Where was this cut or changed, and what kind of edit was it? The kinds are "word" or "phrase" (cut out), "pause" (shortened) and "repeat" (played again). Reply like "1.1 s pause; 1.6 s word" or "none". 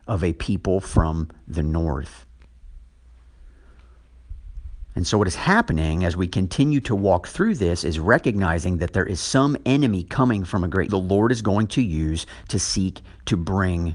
10.9 s phrase